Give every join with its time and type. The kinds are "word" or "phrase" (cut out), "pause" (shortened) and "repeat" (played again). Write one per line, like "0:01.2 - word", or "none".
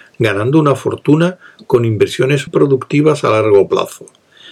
0:02.5 - word